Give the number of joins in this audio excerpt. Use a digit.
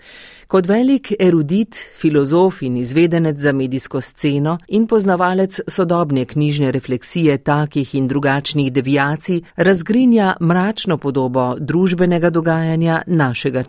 2